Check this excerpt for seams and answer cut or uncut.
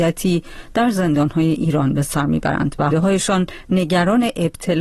cut